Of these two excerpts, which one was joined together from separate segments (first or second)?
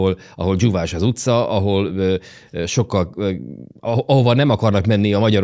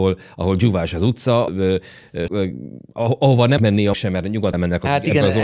second